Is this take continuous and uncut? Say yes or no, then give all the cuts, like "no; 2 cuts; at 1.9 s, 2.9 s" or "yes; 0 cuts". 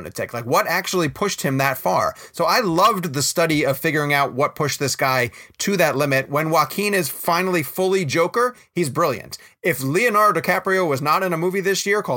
yes; 0 cuts